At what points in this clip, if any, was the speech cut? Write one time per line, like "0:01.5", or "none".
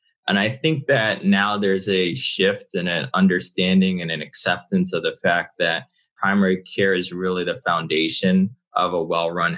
none